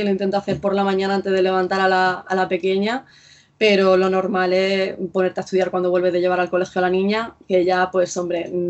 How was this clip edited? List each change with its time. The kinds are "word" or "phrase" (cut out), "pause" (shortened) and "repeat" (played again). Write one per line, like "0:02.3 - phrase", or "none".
none